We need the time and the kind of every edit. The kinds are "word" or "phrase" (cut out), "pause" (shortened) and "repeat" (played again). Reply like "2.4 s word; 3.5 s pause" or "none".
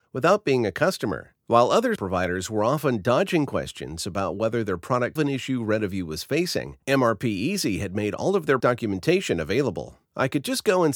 1.4 s pause; 2.0 s word; 5.2 s phrase; 6.8 s pause; 8.6 s word; 10.0 s pause